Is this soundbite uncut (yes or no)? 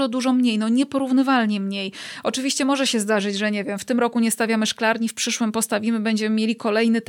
yes